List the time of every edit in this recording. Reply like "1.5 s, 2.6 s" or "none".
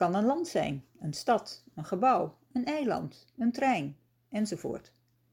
none